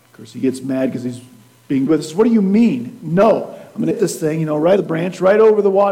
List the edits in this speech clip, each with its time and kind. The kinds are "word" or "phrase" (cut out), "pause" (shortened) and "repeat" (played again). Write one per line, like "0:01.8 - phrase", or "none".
0:01.9 - word
0:03.9 - word
0:04.8 - word

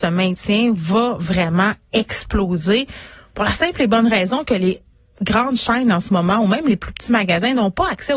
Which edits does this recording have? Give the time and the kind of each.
none

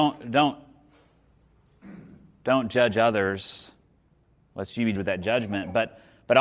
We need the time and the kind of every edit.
0:05.0 - word

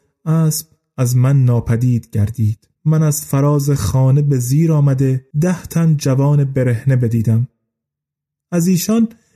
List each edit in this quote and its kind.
0:02.7 - pause
0:05.3 - pause

